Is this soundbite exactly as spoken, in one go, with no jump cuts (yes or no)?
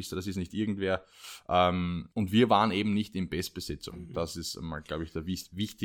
no